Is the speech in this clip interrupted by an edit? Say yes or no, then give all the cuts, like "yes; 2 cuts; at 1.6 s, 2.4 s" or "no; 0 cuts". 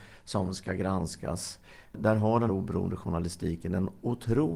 yes; 1 cut; at 2.5 s